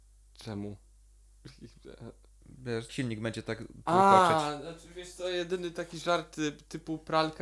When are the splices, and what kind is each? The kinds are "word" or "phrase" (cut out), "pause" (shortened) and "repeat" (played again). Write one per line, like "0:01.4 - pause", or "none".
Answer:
0:02.9 - phrase